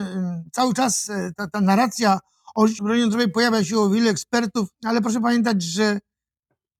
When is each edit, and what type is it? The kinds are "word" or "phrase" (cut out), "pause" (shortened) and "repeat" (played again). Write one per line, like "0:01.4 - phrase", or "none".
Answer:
0:01.4 - word
0:02.8 - word
0:04.7 - pause